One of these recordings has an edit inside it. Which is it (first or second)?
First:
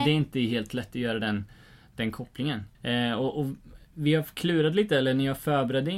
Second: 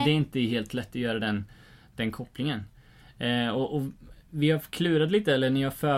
first